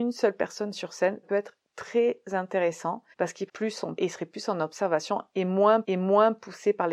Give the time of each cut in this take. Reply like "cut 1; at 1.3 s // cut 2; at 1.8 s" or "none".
cut 1; at 1.2 s // cut 2; at 1.6 s // cut 3; at 3.1 s // cut 4; at 3.5 s // cut 5; at 4.0 s // cut 6; at 5.8 s